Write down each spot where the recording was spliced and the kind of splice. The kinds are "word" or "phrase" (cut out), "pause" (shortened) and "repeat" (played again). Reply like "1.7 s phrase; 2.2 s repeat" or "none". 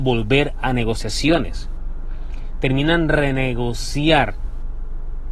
none

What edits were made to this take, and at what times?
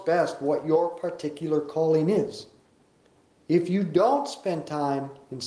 none

